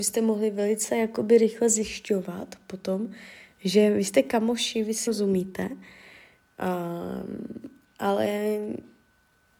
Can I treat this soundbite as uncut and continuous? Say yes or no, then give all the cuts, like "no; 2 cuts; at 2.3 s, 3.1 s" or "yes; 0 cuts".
no; 1 cut; at 5.1 s